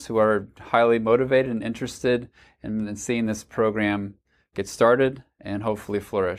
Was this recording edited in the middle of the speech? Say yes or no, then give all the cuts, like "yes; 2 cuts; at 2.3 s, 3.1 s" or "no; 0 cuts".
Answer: no; 0 cuts